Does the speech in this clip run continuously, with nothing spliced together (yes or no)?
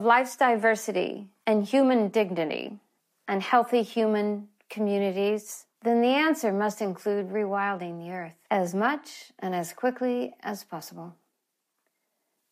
no